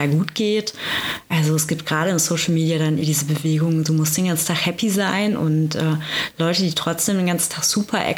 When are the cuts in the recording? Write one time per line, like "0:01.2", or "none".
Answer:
0:03.0